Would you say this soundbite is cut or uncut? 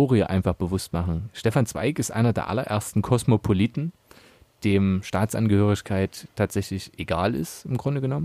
uncut